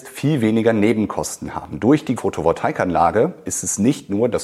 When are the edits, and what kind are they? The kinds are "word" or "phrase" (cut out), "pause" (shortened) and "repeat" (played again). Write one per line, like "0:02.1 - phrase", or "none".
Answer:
0:02.2 - word

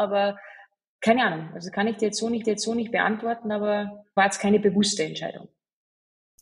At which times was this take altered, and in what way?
0:02.4 - repeat
0:04.2 - word

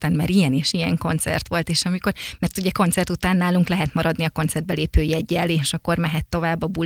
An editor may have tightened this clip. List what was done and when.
none

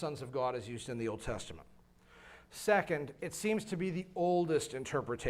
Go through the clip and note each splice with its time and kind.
none

